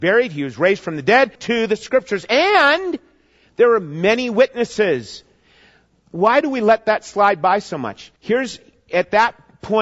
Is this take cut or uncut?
cut